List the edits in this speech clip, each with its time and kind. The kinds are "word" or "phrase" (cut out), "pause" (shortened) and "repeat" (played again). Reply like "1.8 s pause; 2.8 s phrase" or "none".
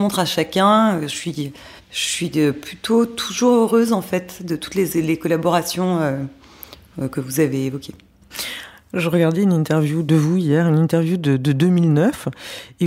1.8 s pause